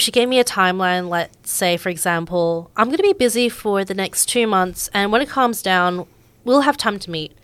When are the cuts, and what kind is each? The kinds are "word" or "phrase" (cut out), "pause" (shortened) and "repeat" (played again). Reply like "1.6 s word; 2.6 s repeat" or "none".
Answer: none